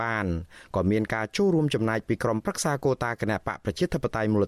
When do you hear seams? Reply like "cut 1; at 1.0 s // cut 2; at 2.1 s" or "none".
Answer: none